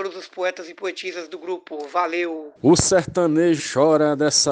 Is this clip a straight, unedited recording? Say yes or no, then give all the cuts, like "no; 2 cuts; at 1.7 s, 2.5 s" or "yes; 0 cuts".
no; 2 cuts; at 2.6 s, 3.6 s